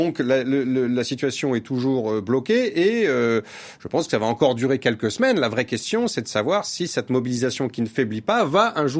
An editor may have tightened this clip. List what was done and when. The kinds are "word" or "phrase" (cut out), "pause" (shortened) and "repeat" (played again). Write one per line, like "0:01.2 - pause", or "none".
none